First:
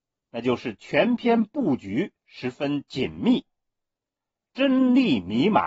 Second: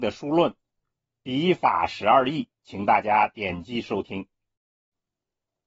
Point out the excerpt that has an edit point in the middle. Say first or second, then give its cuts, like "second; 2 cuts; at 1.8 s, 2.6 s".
second; 1 cut; at 2.5 s